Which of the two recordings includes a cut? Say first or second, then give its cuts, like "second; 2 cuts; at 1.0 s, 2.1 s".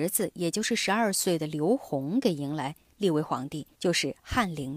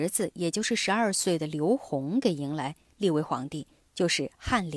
first; 1 cut; at 3.7 s